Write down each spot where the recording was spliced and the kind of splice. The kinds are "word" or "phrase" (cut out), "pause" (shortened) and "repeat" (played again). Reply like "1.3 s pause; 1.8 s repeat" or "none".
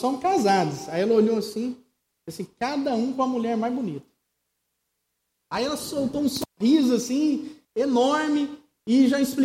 7.6 s pause